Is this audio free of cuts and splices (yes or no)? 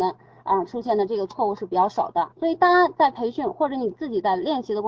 no